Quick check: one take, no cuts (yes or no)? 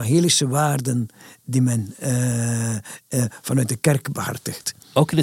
yes